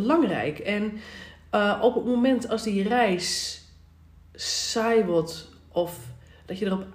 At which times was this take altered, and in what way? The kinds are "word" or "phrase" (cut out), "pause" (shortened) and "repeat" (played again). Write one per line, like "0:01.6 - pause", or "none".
none